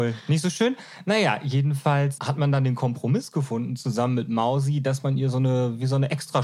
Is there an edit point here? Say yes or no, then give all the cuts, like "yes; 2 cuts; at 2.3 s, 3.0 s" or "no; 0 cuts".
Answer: yes; 1 cut; at 2.2 s